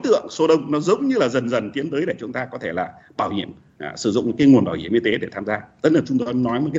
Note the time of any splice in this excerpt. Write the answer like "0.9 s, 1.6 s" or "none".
none